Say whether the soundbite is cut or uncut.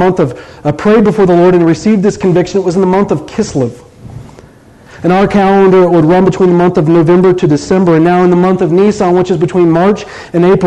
uncut